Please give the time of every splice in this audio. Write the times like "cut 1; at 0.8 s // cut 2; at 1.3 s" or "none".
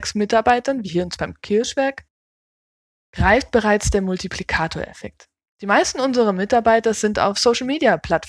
none